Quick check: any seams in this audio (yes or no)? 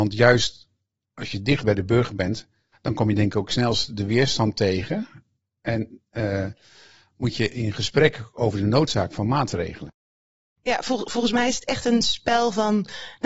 yes